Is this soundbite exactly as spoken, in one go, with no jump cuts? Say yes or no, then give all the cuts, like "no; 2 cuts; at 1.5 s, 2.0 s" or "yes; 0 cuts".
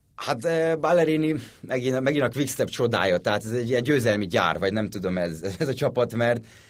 yes; 0 cuts